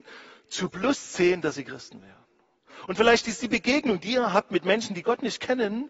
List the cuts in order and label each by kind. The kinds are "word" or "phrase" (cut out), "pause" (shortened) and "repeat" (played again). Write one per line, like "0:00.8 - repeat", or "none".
none